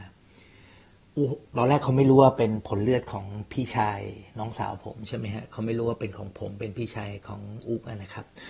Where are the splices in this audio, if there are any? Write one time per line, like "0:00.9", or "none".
0:04.3